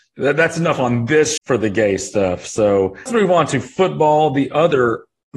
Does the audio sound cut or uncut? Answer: cut